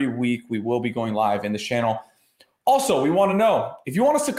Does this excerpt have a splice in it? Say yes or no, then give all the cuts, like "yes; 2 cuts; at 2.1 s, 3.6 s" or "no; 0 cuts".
no; 0 cuts